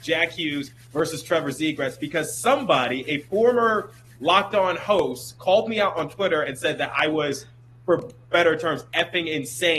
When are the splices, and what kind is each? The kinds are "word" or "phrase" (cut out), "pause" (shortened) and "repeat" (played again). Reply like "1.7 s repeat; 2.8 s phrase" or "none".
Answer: none